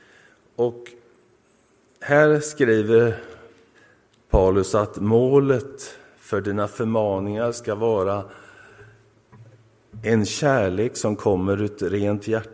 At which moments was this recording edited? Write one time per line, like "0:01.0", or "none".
0:03.7